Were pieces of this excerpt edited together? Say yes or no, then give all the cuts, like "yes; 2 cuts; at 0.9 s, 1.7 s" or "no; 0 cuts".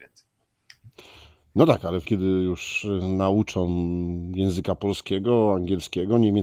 yes; 1 cut; at 2.1 s